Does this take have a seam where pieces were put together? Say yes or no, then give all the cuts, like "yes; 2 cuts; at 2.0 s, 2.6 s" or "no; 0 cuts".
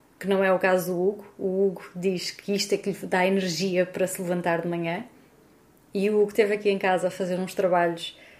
no; 0 cuts